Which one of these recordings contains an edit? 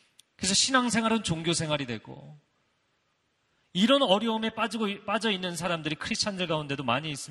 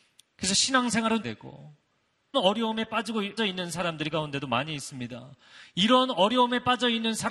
second; 4 cuts; at 1.2 s, 2.3 s, 3.4 s, 4.1 s

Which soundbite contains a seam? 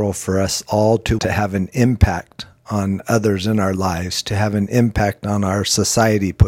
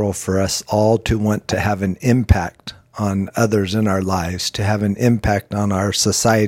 first; 1 cut; at 1.2 s

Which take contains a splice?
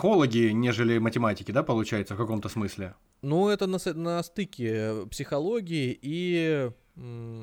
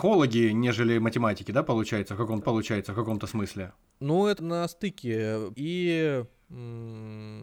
second; 3 cuts; at 2.4 s, 4.4 s, 5.5 s

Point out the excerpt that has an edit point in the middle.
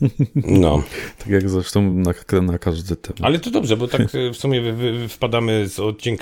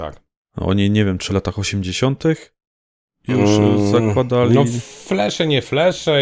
second; 1 cut; at 1.3 s

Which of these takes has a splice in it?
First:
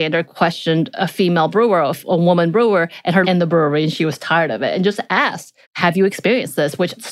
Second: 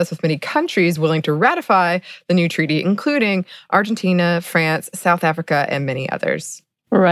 first; 2 cuts; at 3.2 s, 5.6 s

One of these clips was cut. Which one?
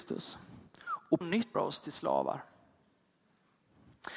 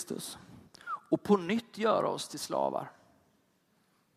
first; 2 cuts; at 1.2 s, 1.5 s

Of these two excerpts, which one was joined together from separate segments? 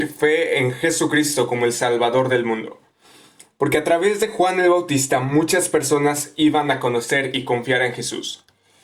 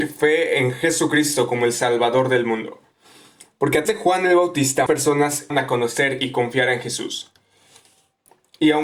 second; 3 cuts; at 3.9 s, 4.9 s, 5.5 s

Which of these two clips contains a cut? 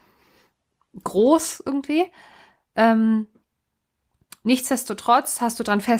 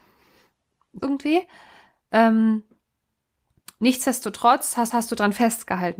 second; 2 cuts; at 1.0 s, 4.9 s

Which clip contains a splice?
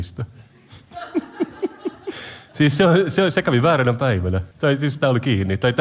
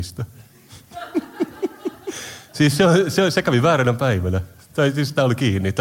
first; 1 cut; at 4.5 s

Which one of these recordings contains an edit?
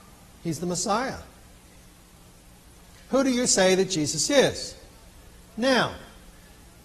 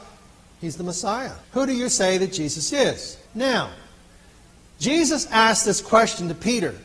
second; 2 cuts; at 1.4 s, 3.3 s

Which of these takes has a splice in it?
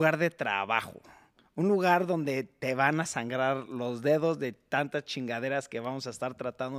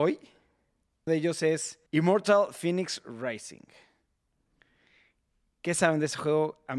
second; 2 cuts; at 1.1 s, 1.9 s

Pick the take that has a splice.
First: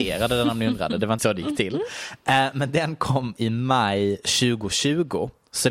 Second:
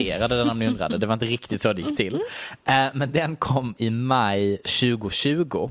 first; 1 cut; at 1.2 s

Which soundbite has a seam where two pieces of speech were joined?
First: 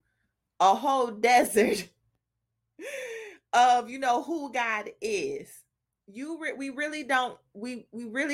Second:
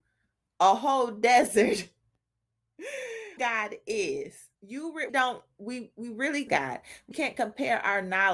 second; 5 cuts; at 3.4 s, 4.5 s, 5.1 s, 6.5 s, 7.1 s

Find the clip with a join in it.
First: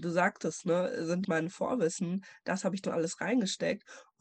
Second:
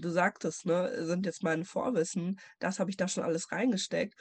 first; 2 cuts; at 1.2 s, 2.8 s

